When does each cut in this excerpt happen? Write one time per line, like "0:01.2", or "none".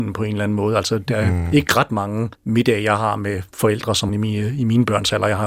0:02.3
0:03.5
0:04.1